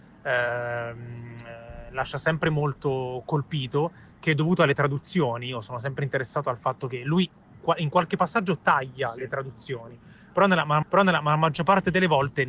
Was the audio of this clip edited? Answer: yes; 1 cut; at 10.8 s

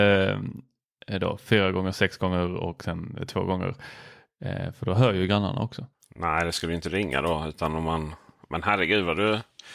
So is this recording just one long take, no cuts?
yes; 0 cuts

